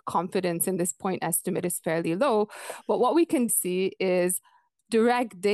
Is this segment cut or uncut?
cut